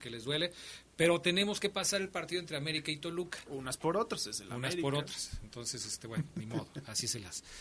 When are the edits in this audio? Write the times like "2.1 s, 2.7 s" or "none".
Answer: none